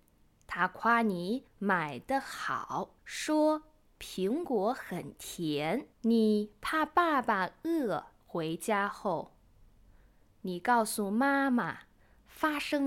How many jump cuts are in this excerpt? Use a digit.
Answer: 4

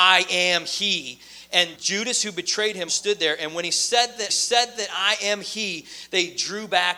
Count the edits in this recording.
3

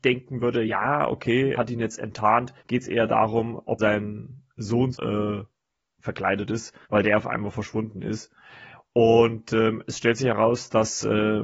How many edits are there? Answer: 5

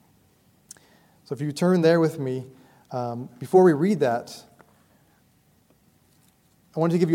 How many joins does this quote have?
0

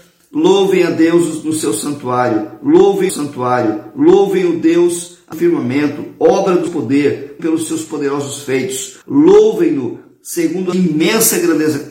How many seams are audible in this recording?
6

